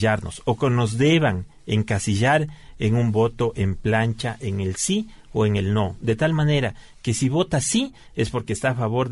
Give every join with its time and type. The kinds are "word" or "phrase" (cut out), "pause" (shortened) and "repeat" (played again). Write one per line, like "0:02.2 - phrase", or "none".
none